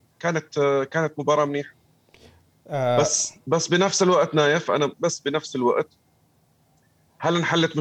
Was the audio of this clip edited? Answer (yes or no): no